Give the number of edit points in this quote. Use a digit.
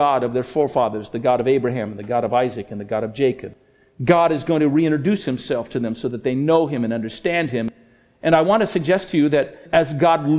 0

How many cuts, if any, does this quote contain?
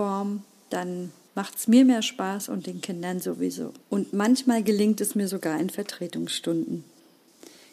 2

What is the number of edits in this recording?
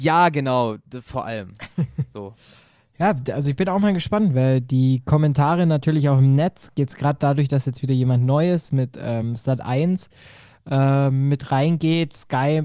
0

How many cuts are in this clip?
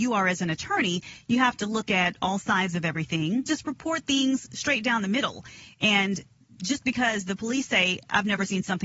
1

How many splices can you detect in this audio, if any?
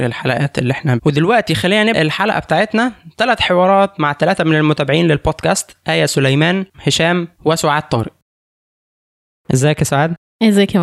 3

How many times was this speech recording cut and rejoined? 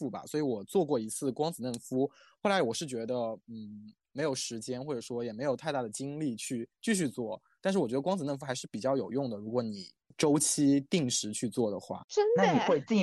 0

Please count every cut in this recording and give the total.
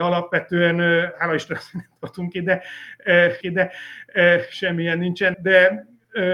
2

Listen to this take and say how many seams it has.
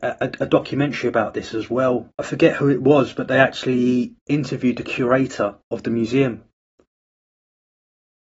2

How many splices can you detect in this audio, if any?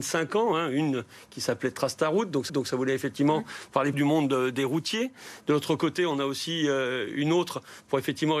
2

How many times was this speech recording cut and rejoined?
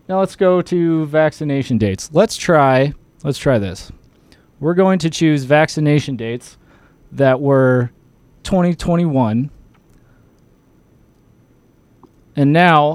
1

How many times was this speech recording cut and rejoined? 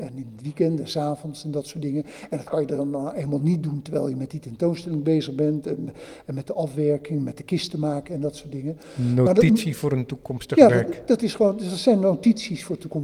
0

